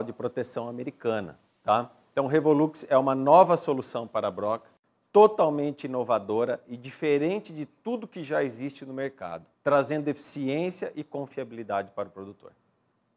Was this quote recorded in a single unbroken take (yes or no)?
no